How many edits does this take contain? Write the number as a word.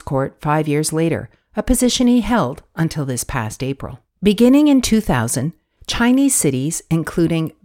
one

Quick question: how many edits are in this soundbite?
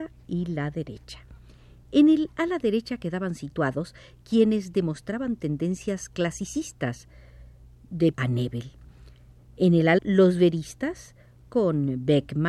two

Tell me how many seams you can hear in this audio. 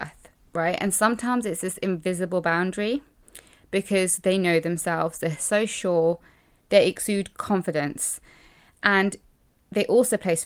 zero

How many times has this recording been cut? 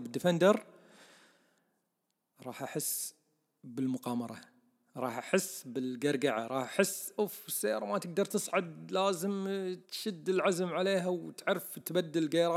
one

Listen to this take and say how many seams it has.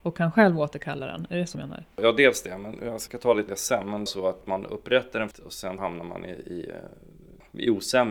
six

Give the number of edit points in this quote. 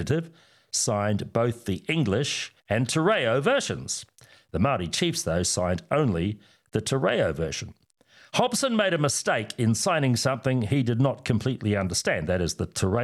one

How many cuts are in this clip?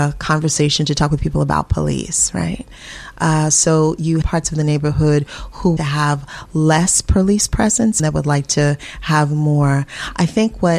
three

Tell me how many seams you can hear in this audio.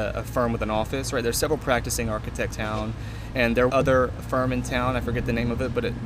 three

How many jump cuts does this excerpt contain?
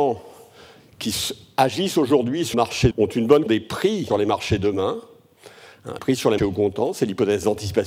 six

